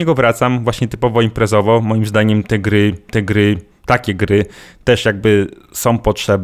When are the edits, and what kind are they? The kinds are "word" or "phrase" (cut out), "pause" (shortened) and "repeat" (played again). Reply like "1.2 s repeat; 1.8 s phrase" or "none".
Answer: 3.1 s repeat